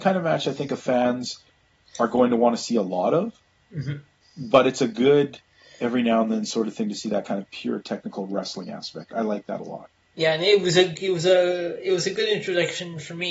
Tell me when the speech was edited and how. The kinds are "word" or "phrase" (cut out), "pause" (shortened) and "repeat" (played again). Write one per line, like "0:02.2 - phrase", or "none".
none